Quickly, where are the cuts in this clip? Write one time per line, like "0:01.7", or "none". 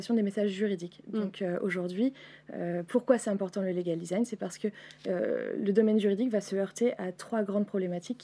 none